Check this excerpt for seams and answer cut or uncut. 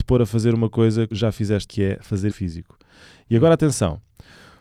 cut